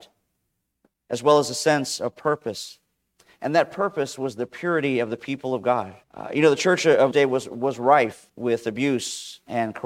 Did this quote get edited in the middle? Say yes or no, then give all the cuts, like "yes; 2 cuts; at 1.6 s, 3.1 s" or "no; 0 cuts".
yes; 3 cuts; at 6.0 s, 7.1 s, 8.3 s